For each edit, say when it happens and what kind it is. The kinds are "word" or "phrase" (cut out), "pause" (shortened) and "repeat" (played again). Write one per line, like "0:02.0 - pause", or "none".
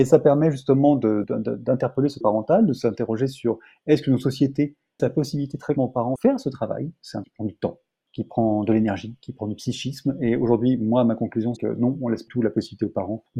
0:01.2 - word
0:02.2 - word
0:05.0 - word
0:05.8 - word
0:06.2 - word
0:07.2 - word
0:11.6 - word
0:12.3 - word